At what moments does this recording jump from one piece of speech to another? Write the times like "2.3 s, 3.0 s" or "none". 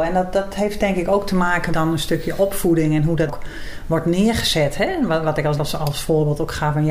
1.7 s, 3.3 s, 5.6 s

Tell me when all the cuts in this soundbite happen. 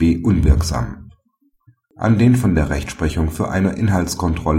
none

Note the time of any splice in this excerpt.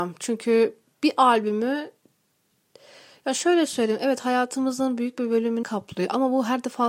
5.6 s

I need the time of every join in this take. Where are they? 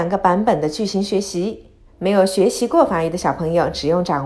1.9 s

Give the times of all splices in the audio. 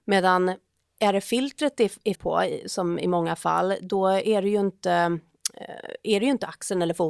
2.1 s

